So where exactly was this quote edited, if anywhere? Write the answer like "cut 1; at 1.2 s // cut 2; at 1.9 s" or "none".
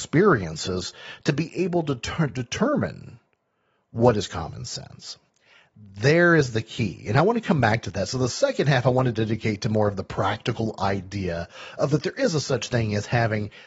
none